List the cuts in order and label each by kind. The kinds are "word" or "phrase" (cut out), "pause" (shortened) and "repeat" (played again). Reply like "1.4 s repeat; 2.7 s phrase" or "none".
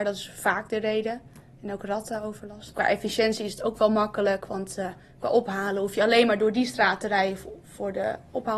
none

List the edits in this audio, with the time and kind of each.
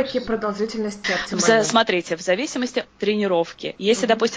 1.0 s word; 2.9 s word

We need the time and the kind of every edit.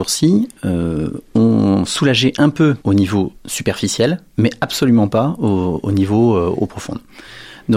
2.8 s pause; 3.3 s pause

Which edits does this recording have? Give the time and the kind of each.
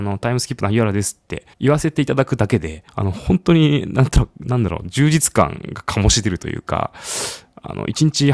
1.5 s pause; 2.9 s pause

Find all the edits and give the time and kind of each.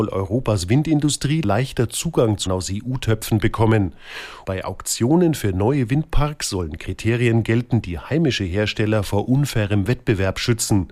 2.5 s word

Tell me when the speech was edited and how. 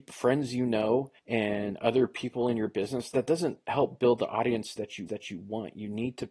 1.2 s pause; 3.1 s word; 5.1 s repeat

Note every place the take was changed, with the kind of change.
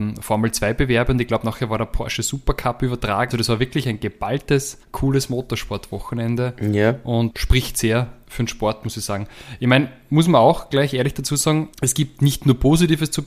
3.3 s word; 4.8 s pause; 7.3 s word; 11.7 s pause

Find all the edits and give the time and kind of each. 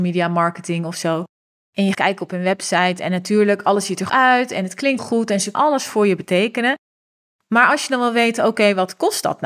1.9 s word; 4.1 s word; 5.0 s word; 5.5 s word

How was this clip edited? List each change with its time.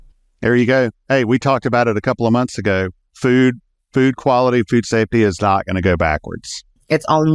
none

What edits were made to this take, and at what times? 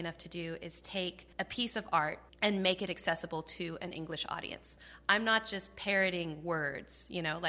1.3 s pause; 2.3 s pause

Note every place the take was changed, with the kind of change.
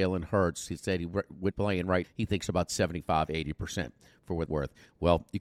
1.5 s word; 2.0 s word; 4.5 s word

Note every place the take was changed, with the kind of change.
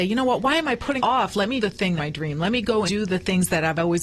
1.0 s word; 1.6 s word; 2.0 s word; 2.9 s word

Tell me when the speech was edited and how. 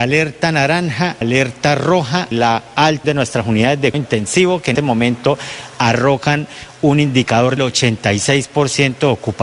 1.2 s word; 2.3 s word; 3.0 s word; 3.9 s word; 4.8 s word; 7.6 s word

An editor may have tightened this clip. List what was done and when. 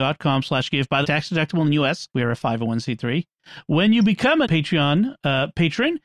1.0 s phrase; 2.1 s pause; 4.4 s word

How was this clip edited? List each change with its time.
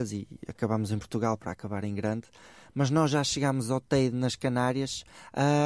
none

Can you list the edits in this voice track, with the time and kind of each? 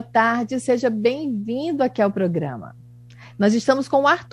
none

